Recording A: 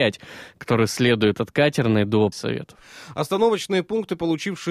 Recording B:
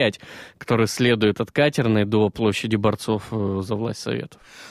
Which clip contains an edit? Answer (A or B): A